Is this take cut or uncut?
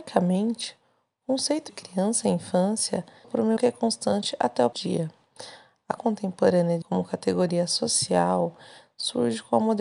cut